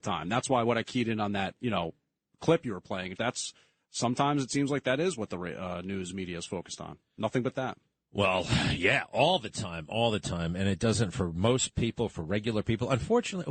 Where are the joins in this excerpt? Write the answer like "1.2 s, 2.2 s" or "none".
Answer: 3.2 s